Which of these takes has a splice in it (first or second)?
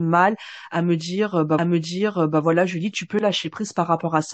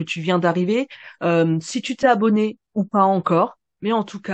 first